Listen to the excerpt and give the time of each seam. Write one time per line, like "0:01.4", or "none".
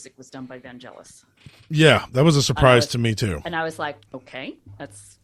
0:04.1